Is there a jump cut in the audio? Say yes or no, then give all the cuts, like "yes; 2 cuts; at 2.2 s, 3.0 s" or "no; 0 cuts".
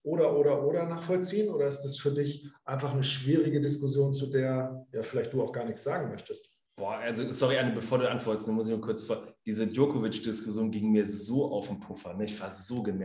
no; 0 cuts